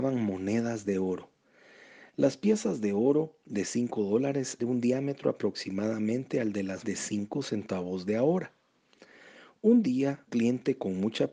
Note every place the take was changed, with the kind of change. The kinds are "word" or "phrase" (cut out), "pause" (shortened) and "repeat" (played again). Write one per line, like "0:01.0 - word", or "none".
0:04.6 - word
0:06.8 - word
0:10.3 - word